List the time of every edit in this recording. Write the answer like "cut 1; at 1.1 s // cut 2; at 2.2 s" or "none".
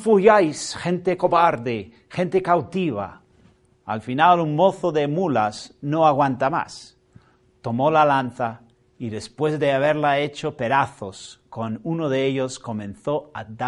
none